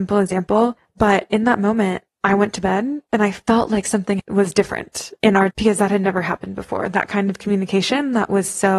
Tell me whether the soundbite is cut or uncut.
cut